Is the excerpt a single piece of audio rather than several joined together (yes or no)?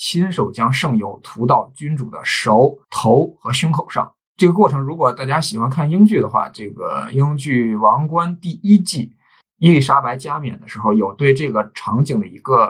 no